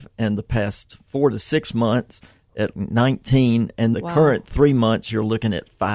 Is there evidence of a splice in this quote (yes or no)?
yes